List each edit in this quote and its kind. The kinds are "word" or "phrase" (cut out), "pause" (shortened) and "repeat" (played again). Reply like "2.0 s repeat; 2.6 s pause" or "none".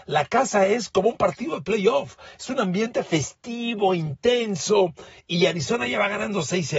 none